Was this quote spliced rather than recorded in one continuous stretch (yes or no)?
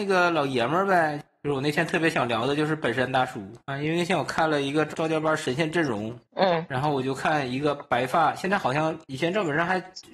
yes